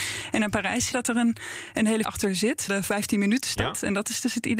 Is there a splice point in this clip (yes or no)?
yes